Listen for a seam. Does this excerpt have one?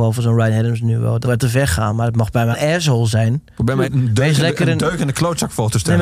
yes; 3 cuts; at 1.2 s, 2.5 s, 3.8 s

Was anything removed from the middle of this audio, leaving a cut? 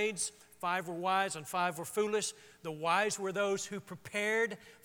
no; 0 cuts

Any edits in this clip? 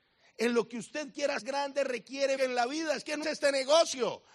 yes; 3 cuts; at 1.4 s, 2.4 s, 3.2 s

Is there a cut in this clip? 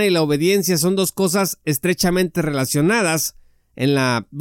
no; 0 cuts

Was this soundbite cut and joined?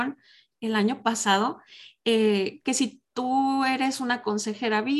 no; 0 cuts

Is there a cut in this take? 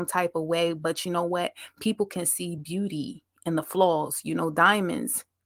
no; 0 cuts

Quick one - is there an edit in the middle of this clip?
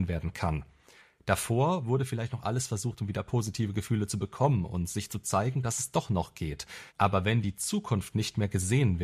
yes; 1 cut; at 6.9 s

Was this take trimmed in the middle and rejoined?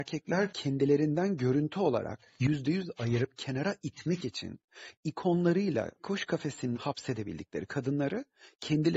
yes; 2 cuts; at 6.0 s, 6.7 s

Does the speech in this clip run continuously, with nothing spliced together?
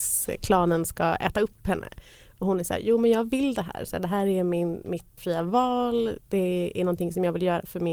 no; 1 cut; at 5.2 s

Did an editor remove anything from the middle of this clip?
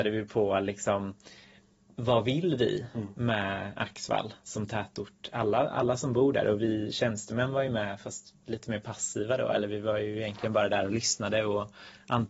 no; 0 cuts

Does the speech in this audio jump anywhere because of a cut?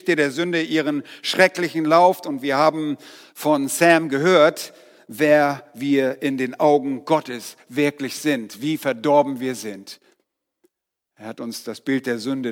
no; 0 cuts

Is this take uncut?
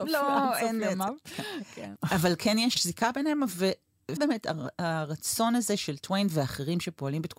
no; 1 cut; at 4.2 s

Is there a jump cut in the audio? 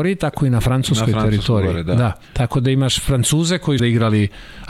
yes; 2 cuts; at 2.2 s, 3.8 s

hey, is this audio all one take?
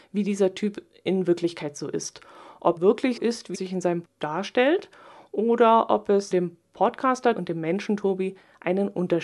no; 6 cuts; at 2.8 s, 3.2 s, 3.5 s, 4.0 s, 6.3 s, 7.4 s

